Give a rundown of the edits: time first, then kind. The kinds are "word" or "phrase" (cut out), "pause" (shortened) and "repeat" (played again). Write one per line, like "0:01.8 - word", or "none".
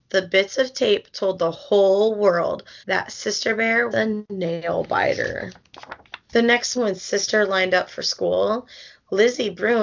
0:02.8 - pause
0:03.9 - word
0:06.2 - pause
0:06.8 - word